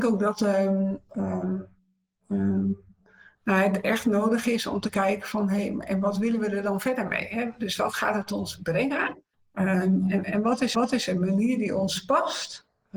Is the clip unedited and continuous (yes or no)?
no